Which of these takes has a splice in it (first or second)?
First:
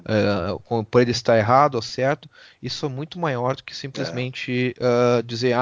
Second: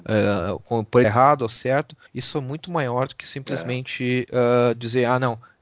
second